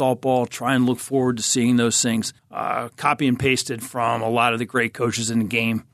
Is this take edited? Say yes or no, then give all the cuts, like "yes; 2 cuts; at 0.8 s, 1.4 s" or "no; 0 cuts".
yes; 1 cut; at 2.4 s